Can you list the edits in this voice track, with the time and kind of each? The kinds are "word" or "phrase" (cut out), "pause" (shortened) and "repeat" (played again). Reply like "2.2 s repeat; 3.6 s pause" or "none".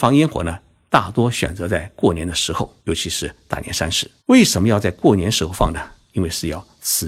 2.8 s pause; 4.2 s pause